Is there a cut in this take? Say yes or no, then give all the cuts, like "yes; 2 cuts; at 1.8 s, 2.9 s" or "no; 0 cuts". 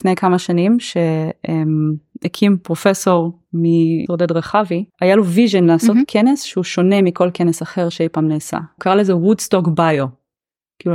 yes; 3 cuts; at 4.1 s, 4.9 s, 8.8 s